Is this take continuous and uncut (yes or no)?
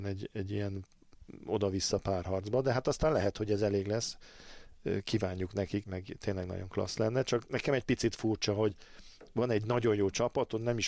no